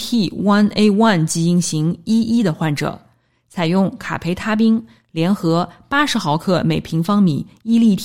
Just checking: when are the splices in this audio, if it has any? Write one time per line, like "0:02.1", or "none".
none